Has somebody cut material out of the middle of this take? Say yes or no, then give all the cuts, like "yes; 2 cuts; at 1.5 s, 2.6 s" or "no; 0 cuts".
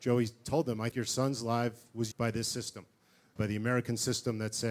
yes; 3 cuts; at 0.9 s, 2.1 s, 3.4 s